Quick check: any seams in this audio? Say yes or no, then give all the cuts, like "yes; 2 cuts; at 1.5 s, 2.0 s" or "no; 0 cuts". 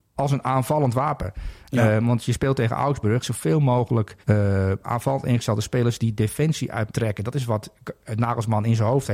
yes; 3 cuts; at 3.2 s, 4.2 s, 6.9 s